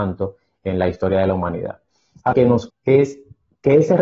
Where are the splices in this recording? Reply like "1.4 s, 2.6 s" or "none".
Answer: 2.3 s, 2.7 s